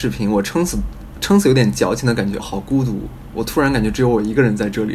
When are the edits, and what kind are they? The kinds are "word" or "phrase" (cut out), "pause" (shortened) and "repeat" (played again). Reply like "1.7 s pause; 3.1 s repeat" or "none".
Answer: 2.4 s phrase